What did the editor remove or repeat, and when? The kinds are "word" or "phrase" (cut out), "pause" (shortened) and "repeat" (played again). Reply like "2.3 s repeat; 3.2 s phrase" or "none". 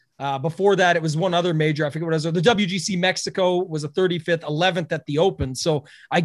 none